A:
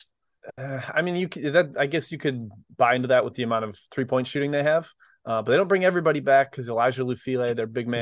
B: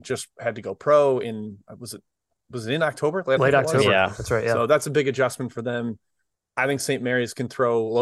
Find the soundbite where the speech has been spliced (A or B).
B